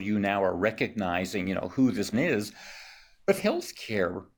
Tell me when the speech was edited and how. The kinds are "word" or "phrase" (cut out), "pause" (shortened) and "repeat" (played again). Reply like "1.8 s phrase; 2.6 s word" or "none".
2.1 s word; 3.4 s phrase